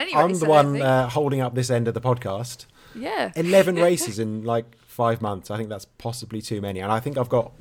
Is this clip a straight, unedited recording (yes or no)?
yes